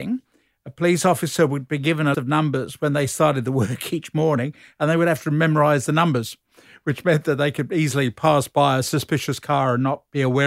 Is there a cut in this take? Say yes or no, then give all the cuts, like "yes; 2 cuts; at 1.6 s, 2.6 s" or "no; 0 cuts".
yes; 1 cut; at 2.1 s